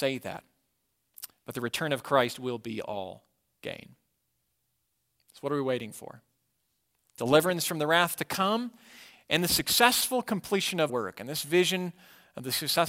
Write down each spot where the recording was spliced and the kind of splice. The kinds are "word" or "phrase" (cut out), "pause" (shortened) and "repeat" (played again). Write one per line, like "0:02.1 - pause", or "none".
0:10.9 - word